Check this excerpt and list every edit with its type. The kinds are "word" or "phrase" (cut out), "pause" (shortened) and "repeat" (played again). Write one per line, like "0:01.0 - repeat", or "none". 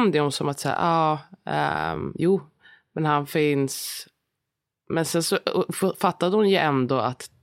none